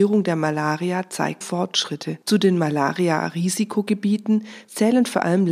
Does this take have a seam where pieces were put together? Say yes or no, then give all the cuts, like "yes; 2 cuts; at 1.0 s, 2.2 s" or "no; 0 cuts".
yes; 2 cuts; at 1.4 s, 2.2 s